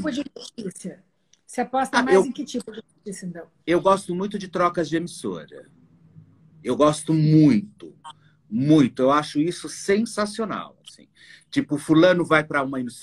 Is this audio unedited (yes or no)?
yes